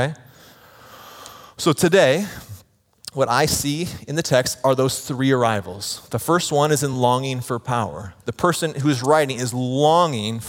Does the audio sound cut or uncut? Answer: uncut